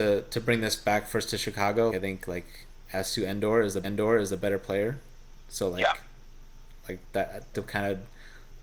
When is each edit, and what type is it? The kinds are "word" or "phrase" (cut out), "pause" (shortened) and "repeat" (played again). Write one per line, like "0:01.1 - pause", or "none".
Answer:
0:01.9 - word
0:03.8 - repeat
0:07.5 - word